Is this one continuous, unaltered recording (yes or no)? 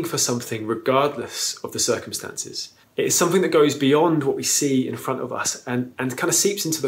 no